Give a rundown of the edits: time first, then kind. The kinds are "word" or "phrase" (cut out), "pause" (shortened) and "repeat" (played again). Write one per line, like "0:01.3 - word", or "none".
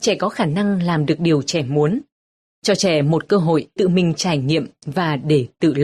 0:03.8 - word